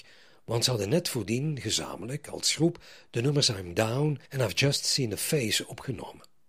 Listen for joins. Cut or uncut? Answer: cut